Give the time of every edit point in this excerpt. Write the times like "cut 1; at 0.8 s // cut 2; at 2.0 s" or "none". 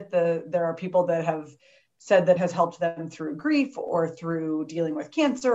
cut 1; at 2.4 s